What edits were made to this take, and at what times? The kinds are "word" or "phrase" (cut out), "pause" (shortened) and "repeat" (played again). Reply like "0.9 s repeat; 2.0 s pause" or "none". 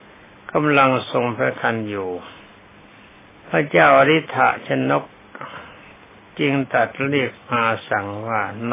none